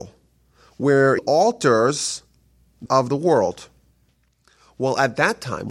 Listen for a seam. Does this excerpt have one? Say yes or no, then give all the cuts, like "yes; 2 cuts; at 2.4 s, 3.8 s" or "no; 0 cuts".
yes; 2 cuts; at 1.2 s, 2.9 s